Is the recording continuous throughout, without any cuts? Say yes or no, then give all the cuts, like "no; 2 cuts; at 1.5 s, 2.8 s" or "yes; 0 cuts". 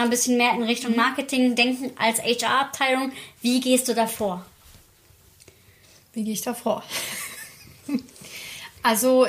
yes; 0 cuts